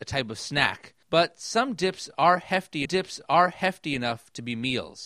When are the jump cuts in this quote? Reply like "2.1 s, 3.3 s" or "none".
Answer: 1.0 s, 2.9 s